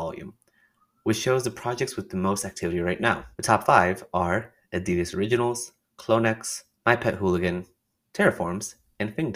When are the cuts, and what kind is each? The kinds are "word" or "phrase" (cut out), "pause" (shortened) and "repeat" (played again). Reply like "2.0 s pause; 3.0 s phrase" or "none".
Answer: 3.3 s pause; 6.8 s pause